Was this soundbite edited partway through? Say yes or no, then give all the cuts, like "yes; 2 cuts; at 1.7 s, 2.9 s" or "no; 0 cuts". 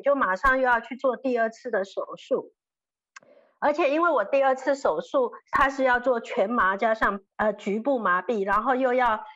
yes; 1 cut; at 7.3 s